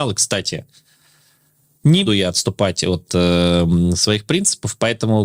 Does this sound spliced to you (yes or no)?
yes